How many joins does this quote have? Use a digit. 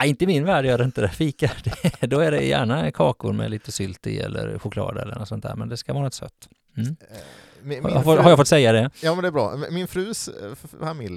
0